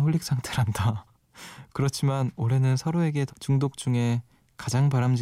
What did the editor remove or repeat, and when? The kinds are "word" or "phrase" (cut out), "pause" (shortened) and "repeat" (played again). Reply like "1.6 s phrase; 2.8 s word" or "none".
3.3 s phrase